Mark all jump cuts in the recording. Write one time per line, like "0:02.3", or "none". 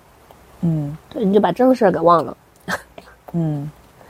0:01.0